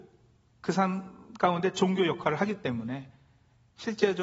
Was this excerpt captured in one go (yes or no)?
yes